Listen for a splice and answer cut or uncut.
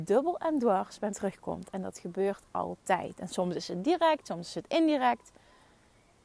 cut